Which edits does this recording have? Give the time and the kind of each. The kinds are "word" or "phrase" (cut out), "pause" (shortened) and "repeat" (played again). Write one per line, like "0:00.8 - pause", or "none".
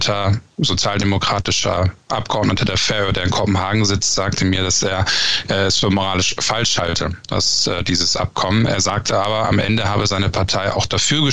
none